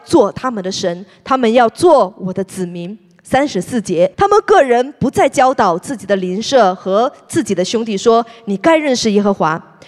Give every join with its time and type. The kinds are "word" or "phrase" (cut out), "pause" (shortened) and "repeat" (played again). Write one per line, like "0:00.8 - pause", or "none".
0:04.1 - pause